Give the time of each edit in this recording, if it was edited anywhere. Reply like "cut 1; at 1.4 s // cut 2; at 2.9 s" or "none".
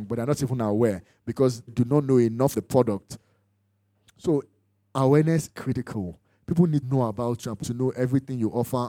cut 1; at 1.7 s // cut 2; at 2.5 s // cut 3; at 5.5 s // cut 4; at 6.8 s // cut 5; at 7.6 s